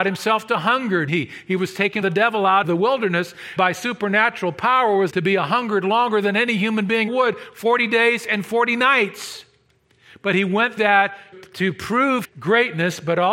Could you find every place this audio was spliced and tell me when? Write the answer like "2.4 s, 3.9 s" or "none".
1.1 s, 2.0 s, 2.6 s, 3.6 s, 5.1 s, 7.1 s, 10.8 s, 11.3 s, 12.2 s